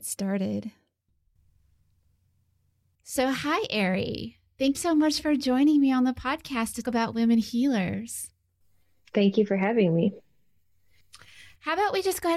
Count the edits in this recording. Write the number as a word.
two